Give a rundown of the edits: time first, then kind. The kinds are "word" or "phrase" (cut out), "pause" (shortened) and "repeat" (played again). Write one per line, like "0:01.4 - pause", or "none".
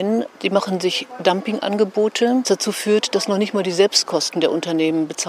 0:02.4 - word

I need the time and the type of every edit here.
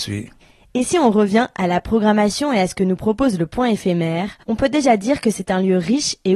0:04.4 - pause

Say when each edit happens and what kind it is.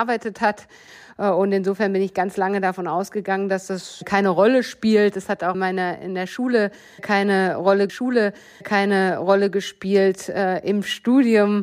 0:05.5 - word
0:07.9 - repeat

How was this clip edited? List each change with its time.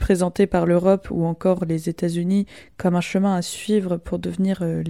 none

